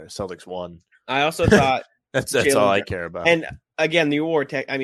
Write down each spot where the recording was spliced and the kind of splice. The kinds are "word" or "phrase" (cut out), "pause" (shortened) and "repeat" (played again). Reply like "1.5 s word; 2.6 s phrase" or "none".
none